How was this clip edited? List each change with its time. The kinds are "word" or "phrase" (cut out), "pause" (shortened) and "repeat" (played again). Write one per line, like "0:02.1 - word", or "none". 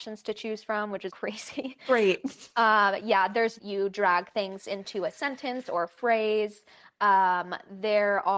0:01.1 - word
0:03.6 - phrase